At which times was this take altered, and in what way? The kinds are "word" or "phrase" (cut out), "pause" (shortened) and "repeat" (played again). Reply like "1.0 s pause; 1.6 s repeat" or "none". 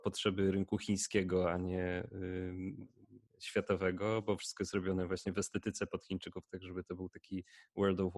3.3 s pause